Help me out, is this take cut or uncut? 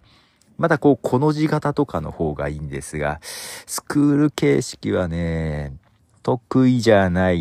uncut